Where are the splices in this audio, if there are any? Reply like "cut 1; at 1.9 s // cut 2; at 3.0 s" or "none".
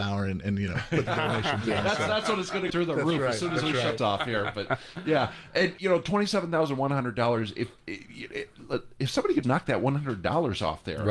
cut 1; at 1.1 s // cut 2; at 2.7 s // cut 3; at 4.0 s // cut 4; at 5.8 s // cut 5; at 9.4 s